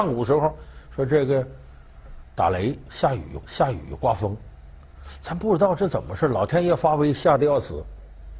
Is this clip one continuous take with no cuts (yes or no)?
no